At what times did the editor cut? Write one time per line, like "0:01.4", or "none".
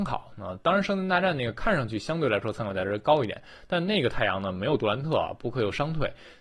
none